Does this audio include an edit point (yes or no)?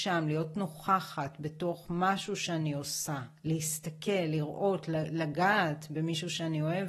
no